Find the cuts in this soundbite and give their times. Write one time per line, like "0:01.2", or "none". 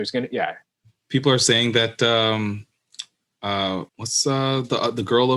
0:03.9